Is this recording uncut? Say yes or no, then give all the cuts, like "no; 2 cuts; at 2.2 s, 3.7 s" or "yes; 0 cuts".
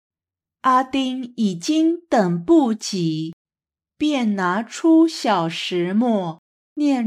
yes; 0 cuts